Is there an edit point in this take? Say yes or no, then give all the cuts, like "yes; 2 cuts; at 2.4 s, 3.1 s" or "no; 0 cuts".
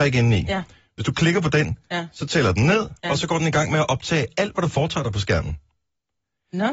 no; 0 cuts